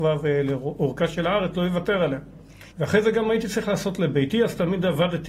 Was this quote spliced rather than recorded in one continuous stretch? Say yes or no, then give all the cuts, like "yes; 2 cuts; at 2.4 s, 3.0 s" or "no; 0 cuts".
yes; 1 cut; at 2.7 s